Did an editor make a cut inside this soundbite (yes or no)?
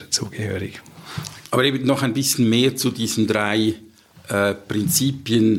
no